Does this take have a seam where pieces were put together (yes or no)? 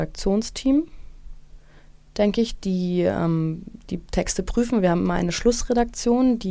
no